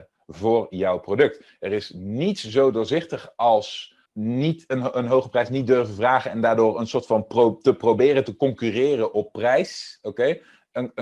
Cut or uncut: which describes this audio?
cut